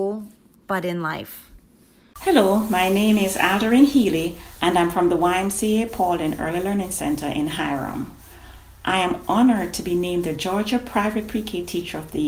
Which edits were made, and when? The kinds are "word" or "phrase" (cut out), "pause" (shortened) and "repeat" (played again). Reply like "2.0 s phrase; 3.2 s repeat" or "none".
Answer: none